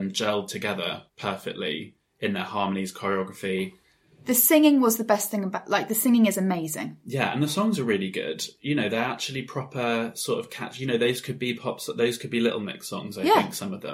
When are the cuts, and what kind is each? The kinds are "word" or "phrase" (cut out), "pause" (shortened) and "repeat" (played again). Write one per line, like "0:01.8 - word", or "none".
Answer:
0:01.1 - pause